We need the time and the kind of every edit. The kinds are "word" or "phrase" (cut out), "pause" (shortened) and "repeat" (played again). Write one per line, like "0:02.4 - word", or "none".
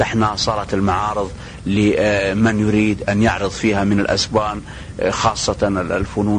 none

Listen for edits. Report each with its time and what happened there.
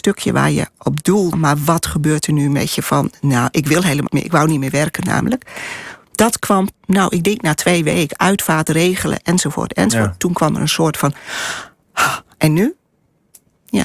0:01.3 - word
0:04.1 - word
0:06.7 - word

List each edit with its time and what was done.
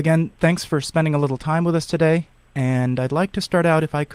none

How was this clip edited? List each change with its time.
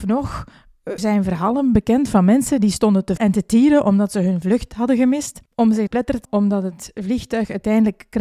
0:01.0 - word
0:03.2 - word
0:05.5 - pause
0:05.9 - phrase
0:06.2 - word

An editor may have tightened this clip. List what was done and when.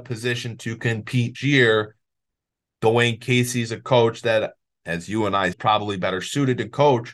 0:01.3 - word
0:05.5 - phrase

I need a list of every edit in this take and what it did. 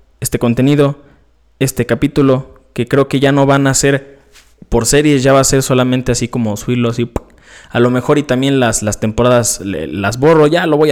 none

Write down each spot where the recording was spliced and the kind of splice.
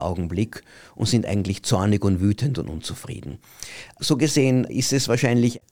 none

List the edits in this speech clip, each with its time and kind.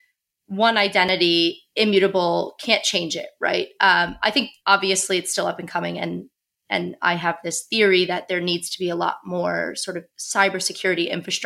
0:04.6 - pause
0:10.1 - pause

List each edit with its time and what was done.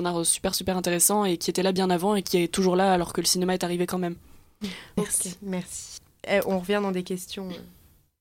none

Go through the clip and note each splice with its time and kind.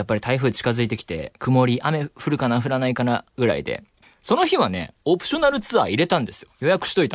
0:04.0 - pause

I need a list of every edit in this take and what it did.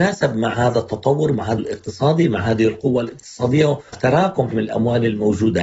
0:01.6 - word
0:03.9 - word
0:04.5 - word

